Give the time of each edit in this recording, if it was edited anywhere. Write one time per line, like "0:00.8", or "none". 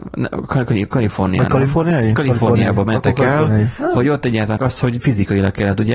0:04.6

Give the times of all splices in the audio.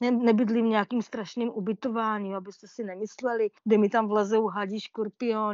0:03.6

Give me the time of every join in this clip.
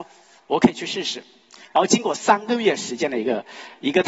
none

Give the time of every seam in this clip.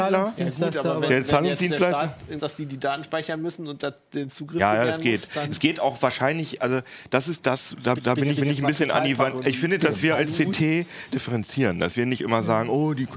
0:02.4
0:08.0
0:08.4
0:09.8
0:11.1

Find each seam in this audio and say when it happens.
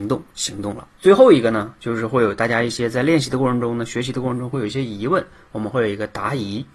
0:00.9

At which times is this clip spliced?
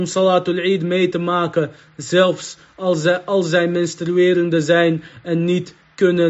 none

